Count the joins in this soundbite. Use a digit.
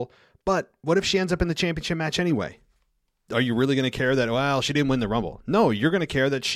0